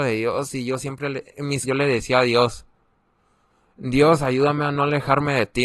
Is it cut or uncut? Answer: cut